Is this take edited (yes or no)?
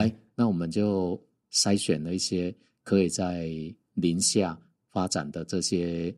no